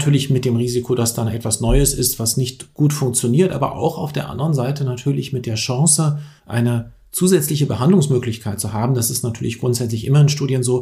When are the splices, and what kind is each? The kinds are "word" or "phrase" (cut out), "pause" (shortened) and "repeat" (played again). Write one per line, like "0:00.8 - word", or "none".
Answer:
0:06.4 - pause